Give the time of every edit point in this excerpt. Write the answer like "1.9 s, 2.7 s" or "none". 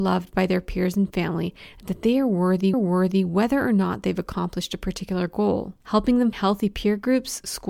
2.7 s, 5.8 s, 6.3 s